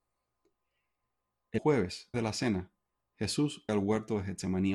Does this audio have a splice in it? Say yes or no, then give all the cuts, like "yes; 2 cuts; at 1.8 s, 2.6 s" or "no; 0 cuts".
yes; 3 cuts; at 1.6 s, 2.1 s, 3.7 s